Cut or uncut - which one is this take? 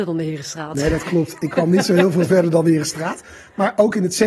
uncut